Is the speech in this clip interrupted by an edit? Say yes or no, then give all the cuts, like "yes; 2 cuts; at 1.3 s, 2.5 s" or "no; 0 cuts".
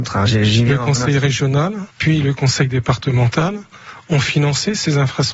yes; 1 cut; at 1.9 s